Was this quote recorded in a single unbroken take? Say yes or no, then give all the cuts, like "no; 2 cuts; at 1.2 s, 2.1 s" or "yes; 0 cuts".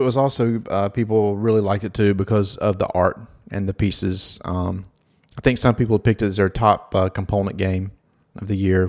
yes; 0 cuts